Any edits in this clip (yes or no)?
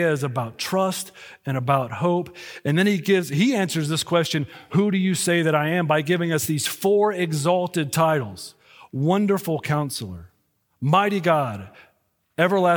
no